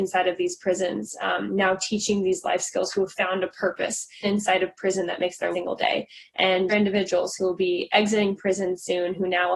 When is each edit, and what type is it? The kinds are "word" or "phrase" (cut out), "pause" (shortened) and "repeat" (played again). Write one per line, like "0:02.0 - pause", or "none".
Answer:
0:04.2 - word
0:05.5 - phrase
0:06.7 - phrase